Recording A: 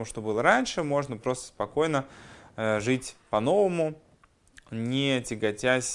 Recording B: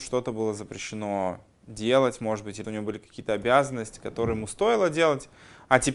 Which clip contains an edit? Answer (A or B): B